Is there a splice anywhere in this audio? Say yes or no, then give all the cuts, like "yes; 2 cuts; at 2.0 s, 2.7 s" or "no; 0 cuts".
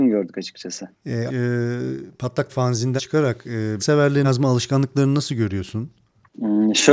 yes; 5 cuts; at 1.3 s, 2.5 s, 3.0 s, 3.8 s, 4.2 s